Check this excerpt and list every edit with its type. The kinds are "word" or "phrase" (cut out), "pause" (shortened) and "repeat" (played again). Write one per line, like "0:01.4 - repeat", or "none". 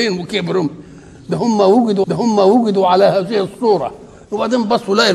0:02.0 - repeat